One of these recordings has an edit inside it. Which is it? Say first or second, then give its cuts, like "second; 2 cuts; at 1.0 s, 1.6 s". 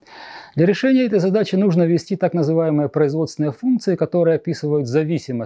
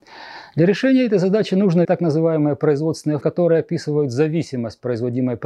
second; 2 cuts; at 1.8 s, 3.2 s